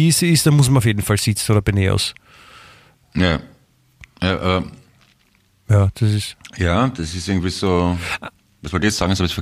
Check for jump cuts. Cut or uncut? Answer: uncut